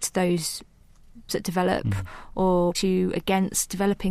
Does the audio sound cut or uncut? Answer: cut